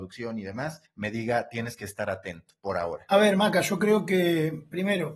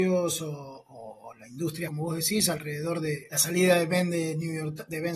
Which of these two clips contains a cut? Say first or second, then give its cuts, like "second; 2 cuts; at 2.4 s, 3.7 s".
second; 1 cut; at 1.9 s